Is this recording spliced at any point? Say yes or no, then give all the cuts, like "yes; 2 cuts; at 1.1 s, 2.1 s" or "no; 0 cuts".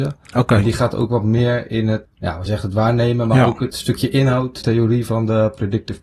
yes; 4 cuts; at 2.0 s, 2.5 s, 3.7 s, 4.6 s